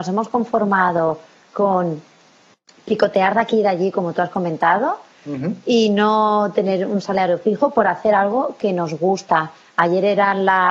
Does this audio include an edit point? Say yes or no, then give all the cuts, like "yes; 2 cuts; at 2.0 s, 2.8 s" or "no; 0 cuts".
no; 0 cuts